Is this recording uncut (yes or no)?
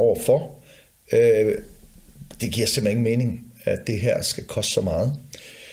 yes